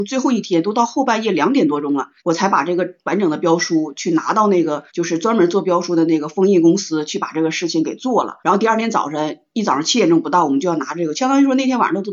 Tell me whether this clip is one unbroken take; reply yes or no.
no